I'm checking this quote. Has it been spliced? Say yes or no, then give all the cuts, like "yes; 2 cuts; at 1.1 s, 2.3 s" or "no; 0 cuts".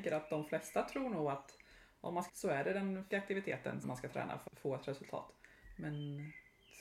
yes; 4 cuts; at 2.3 s, 3.1 s, 3.8 s, 4.5 s